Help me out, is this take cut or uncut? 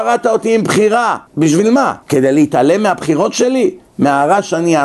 cut